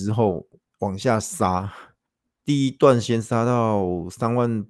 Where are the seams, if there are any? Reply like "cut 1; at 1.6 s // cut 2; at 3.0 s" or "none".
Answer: cut 1; at 2.1 s